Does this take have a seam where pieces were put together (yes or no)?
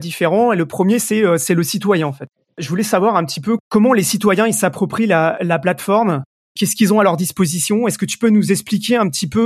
no